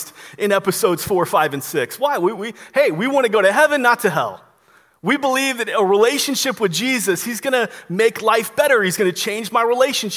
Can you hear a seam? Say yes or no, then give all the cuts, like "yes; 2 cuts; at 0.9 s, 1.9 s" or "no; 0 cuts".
no; 0 cuts